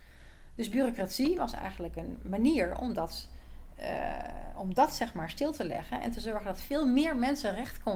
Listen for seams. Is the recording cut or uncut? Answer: uncut